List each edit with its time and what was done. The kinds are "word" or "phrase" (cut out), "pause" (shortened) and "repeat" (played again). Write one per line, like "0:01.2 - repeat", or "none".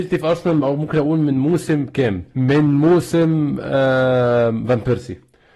0:02.3 - pause

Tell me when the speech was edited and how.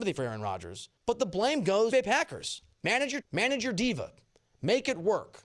0:01.0 - pause
0:01.9 - phrase
0:02.7 - pause
0:03.2 - word

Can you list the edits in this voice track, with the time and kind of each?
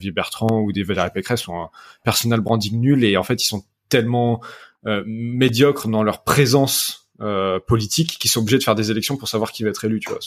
none

